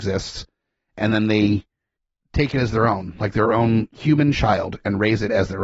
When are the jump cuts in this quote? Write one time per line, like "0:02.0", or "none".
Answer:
none

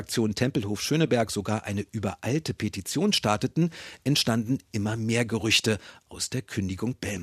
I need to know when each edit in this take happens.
none

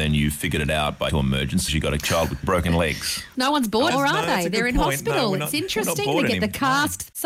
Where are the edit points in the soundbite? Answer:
0:01.1
0:01.7
0:02.4
0:03.9

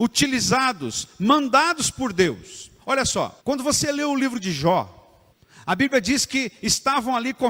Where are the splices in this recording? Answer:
0:03.4
0:05.3

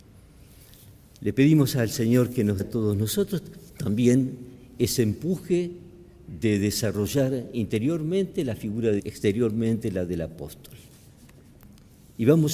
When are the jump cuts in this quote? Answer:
0:02.6
0:03.7
0:09.0

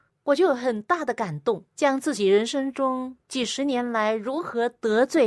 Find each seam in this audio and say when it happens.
0:01.7
0:03.2

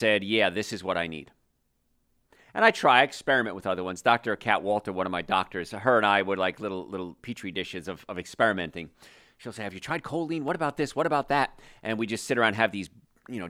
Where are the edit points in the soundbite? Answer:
none

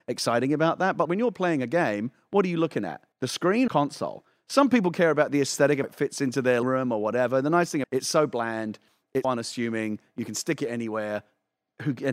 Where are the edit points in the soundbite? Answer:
0:01.0
0:03.1
0:03.7
0:05.8
0:06.6
0:07.8
0:09.2

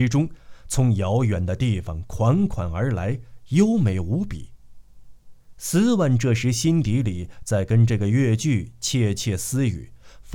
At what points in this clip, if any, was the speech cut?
none

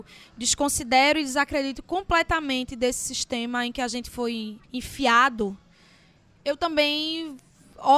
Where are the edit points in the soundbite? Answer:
0:04.6

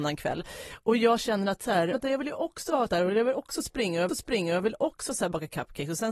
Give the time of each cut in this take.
0:01.9
0:02.9
0:04.1

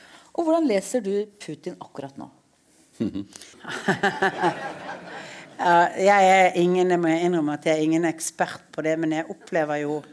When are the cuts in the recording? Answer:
0:03.5

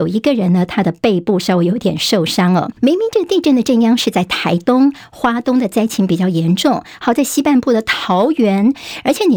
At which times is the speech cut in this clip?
0:02.7

